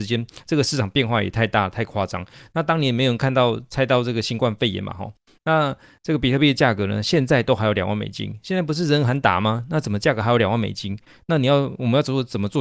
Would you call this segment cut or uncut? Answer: uncut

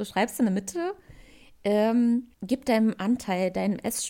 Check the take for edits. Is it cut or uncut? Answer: cut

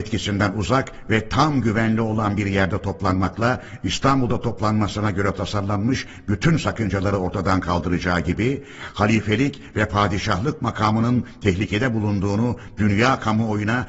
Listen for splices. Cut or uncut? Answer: uncut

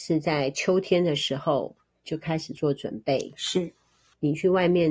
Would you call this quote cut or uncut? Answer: uncut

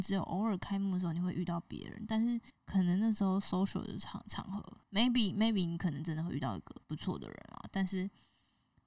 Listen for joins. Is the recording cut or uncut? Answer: cut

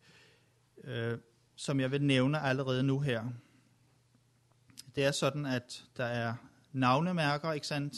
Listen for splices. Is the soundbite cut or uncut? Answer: uncut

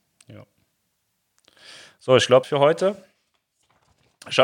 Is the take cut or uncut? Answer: cut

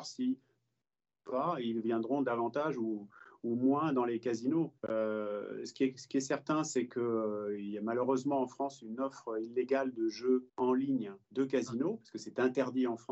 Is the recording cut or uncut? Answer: cut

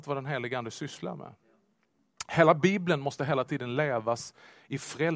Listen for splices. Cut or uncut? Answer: uncut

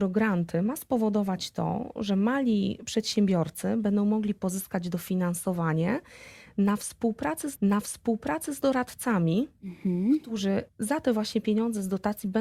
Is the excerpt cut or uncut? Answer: cut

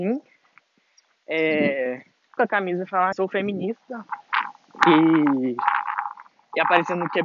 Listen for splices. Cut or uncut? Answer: cut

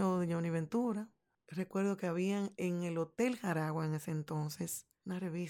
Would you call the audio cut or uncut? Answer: uncut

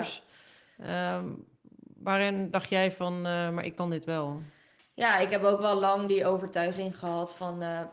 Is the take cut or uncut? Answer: uncut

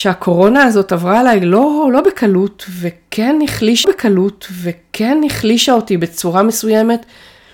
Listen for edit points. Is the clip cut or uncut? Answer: cut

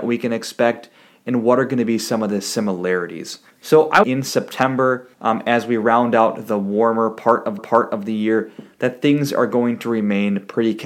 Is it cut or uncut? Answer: cut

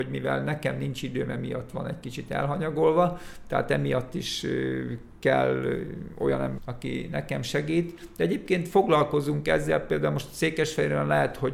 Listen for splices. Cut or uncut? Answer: cut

